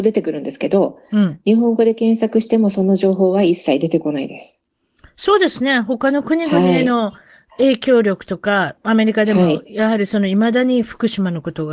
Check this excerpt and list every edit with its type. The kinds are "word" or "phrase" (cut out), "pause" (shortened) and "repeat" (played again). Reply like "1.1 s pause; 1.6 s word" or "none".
none